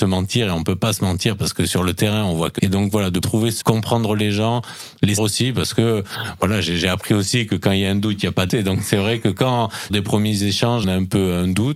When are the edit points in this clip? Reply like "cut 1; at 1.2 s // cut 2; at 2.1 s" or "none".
cut 1; at 2.6 s // cut 2; at 3.2 s // cut 3; at 3.6 s // cut 4; at 5.2 s // cut 5; at 8.5 s // cut 6; at 9.9 s // cut 7; at 10.8 s